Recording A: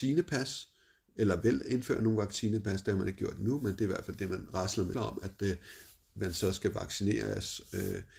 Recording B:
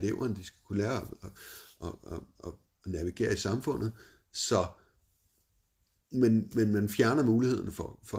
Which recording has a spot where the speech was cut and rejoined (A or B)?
A